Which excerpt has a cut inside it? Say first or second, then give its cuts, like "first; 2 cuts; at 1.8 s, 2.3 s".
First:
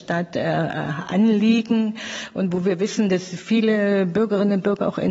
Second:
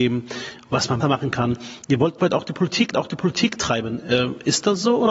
second; 3 cuts; at 1.0 s, 2.2 s, 2.9 s